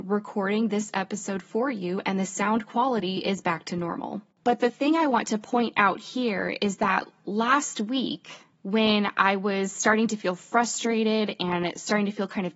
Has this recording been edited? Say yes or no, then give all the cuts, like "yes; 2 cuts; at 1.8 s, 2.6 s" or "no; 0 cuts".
yes; 1 cut; at 8.5 s